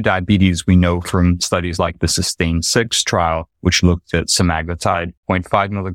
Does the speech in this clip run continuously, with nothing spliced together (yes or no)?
yes